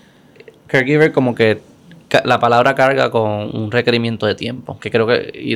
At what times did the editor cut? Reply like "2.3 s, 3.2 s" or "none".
none